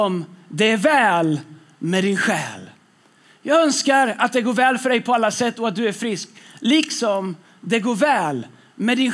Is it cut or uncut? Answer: uncut